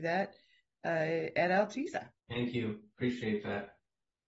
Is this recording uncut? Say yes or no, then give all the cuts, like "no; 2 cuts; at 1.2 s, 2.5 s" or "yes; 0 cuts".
no; 1 cut; at 2.2 s